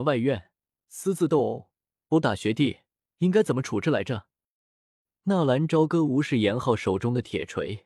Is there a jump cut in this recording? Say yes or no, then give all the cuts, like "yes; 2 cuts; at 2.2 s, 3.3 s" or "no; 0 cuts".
no; 0 cuts